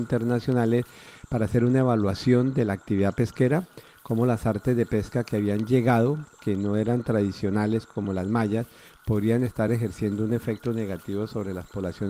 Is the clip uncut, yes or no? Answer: yes